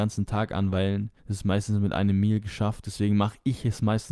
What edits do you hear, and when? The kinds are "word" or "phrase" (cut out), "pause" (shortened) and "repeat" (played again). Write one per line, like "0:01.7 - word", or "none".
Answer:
0:01.2 - pause

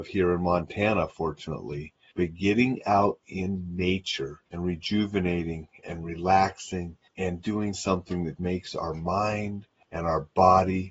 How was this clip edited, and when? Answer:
0:04.5 - pause
0:08.4 - word

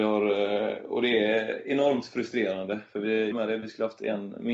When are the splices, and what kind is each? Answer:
0:03.3 - phrase

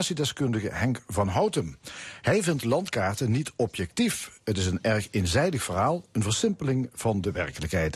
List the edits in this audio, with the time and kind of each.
none

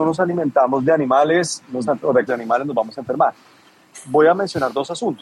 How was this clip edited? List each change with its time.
0:01.9 - word
0:02.3 - word

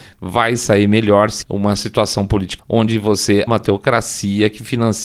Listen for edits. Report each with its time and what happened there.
0:01.4 - phrase
0:02.6 - word
0:03.5 - word

